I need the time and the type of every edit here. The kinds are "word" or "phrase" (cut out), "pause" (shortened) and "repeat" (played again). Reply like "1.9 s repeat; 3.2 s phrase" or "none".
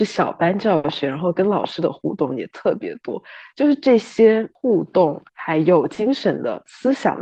5.3 s pause